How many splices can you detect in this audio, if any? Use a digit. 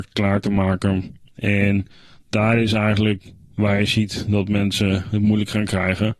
0